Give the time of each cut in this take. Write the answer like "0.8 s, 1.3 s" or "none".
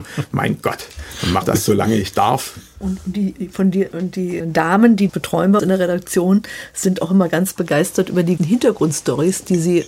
1.4 s, 3.9 s, 4.4 s, 5.1 s, 5.6 s, 8.4 s